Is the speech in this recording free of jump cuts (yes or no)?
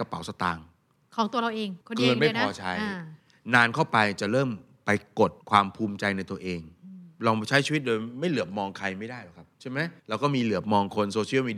no